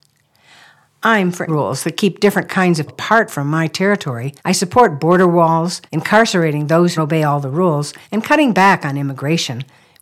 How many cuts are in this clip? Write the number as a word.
six